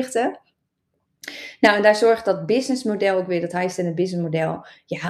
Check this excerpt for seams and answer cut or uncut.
uncut